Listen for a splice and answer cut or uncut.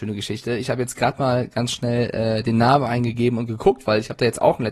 uncut